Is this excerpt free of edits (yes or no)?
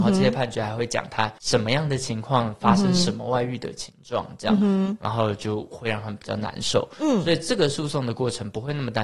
yes